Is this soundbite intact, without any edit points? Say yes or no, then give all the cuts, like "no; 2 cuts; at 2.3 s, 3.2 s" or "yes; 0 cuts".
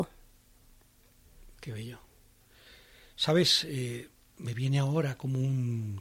yes; 0 cuts